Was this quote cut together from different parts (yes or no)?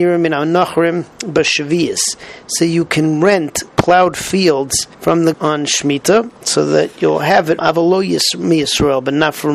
yes